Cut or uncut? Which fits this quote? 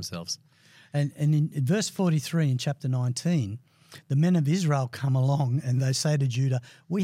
uncut